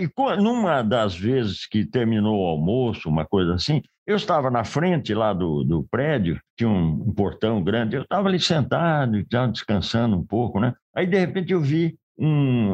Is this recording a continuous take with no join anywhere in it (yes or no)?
yes